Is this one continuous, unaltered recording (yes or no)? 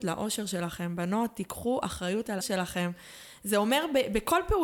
no